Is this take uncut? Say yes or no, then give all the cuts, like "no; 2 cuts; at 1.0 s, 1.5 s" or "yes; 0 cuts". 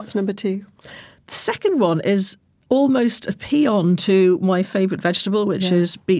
yes; 0 cuts